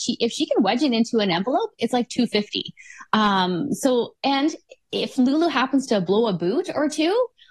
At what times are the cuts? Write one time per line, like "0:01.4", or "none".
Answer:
none

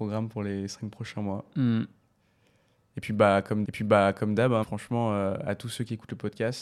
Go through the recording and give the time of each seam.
0:03.6
0:04.6

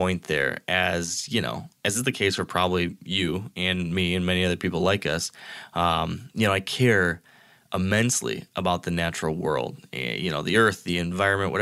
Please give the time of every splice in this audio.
none

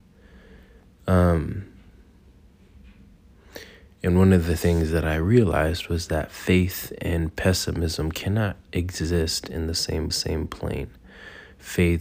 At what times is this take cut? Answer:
0:10.1

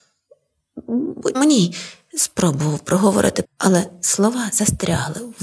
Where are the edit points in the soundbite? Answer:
0:01.3
0:03.4

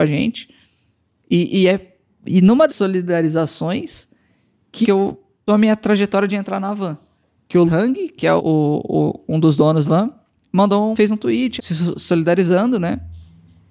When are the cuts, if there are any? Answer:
0:02.7
0:04.8
0:05.5
0:07.7
0:08.4
0:09.8
0:10.9
0:11.6

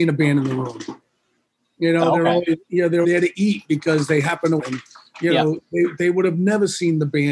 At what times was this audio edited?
0:03.0
0:04.6

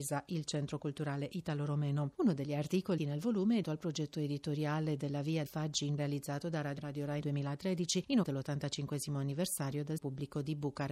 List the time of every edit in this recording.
0:03.0
0:03.6
0:05.5
0:06.0
0:06.8
0:07.2
0:08.2
0:10.0

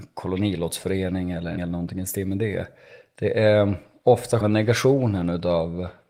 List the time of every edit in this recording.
0:01.6
0:04.4

